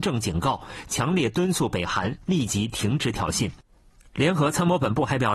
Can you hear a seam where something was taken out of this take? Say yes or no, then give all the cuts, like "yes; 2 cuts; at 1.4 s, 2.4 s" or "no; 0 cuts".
no; 0 cuts